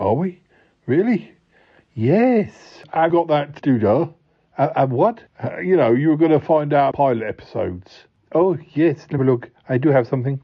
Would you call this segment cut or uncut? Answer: cut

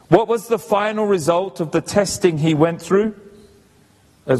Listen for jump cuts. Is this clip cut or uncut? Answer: uncut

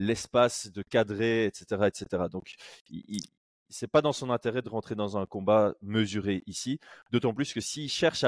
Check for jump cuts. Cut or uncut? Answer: uncut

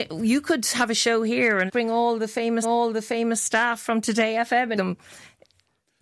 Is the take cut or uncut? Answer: cut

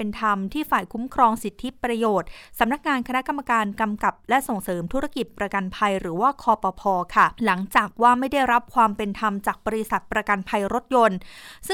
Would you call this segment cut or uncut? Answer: cut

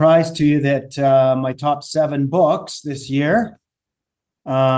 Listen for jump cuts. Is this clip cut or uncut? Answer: uncut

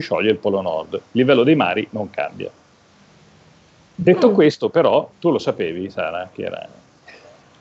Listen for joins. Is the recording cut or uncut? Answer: cut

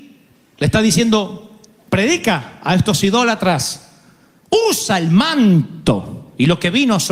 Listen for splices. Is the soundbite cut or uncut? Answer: uncut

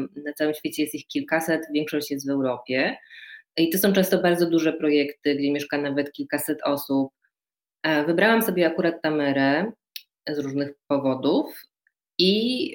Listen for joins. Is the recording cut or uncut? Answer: uncut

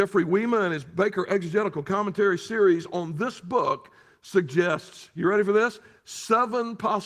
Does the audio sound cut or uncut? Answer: uncut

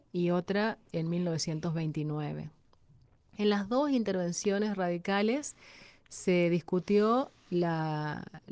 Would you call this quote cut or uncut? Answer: uncut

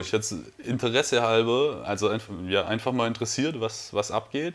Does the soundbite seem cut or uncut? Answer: uncut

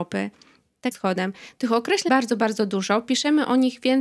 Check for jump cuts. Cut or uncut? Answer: cut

